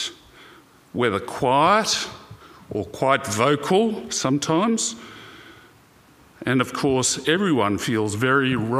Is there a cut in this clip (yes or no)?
no